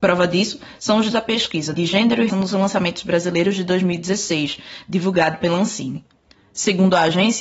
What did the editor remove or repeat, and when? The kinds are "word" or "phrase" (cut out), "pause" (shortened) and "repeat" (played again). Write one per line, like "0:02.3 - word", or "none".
0:01.1 - word
0:01.7 - word
0:02.3 - word